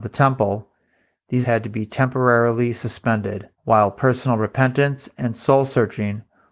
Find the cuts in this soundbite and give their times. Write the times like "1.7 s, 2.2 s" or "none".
1.4 s, 3.5 s